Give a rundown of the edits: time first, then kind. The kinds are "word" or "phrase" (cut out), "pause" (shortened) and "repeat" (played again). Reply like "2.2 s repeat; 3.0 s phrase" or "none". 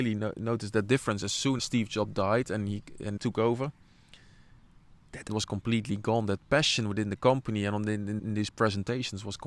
1.6 s word; 3.2 s phrase; 5.3 s word; 8.2 s word